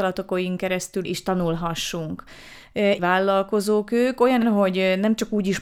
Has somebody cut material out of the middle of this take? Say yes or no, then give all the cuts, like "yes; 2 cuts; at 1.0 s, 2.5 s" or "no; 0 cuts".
yes; 3 cuts; at 1.0 s, 3.0 s, 4.4 s